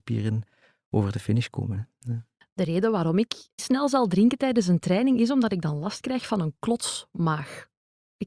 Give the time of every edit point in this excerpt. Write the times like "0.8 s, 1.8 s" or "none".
3.6 s